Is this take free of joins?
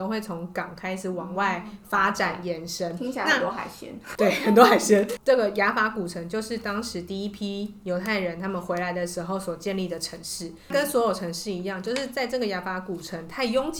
yes; 0 cuts

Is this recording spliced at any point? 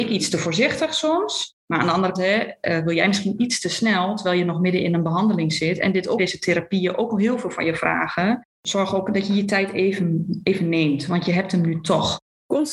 yes; 2 cuts; at 2.1 s, 6.2 s

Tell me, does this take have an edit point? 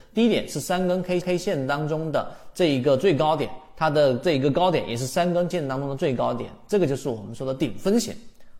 yes; 2 cuts; at 1.2 s, 5.5 s

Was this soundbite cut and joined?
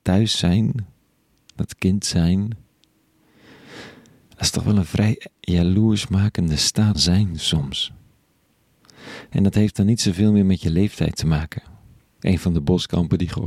yes; 1 cut; at 6.9 s

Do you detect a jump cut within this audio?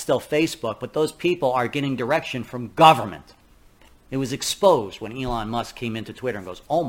no; 0 cuts

